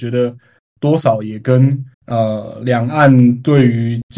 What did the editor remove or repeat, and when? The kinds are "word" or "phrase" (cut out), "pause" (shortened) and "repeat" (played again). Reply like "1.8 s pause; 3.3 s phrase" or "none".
1.9 s pause